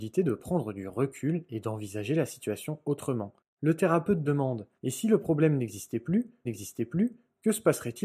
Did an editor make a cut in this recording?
yes; 3 cuts; at 3.4 s, 4.8 s, 6.5 s

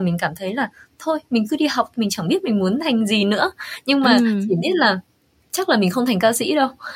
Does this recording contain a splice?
no; 0 cuts

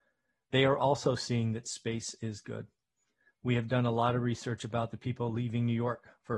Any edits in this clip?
no; 0 cuts

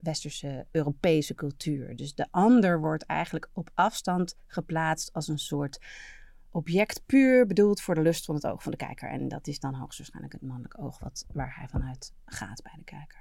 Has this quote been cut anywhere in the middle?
no; 0 cuts

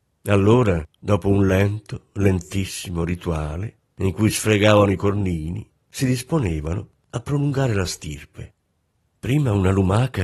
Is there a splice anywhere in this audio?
no; 0 cuts

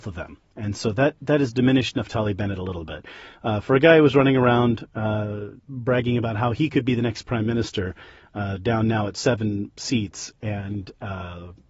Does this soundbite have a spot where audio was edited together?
yes; 1 cut; at 5.6 s

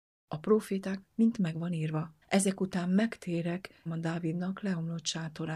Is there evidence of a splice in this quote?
yes; 3 cuts; at 1.0 s, 2.2 s, 3.9 s

